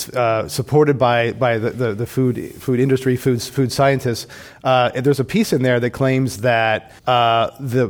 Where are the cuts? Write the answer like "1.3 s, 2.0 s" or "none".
7.0 s